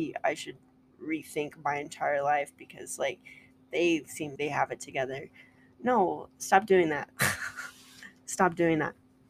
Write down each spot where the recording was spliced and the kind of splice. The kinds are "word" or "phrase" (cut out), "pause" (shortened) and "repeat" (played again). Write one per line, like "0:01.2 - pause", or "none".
0:04.4 - word